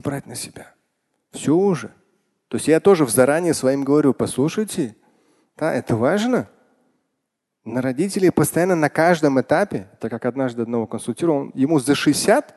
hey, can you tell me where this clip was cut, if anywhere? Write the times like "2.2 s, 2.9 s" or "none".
none